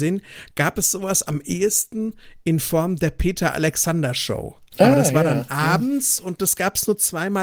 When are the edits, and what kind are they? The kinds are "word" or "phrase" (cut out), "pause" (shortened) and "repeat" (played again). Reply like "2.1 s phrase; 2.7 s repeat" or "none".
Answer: none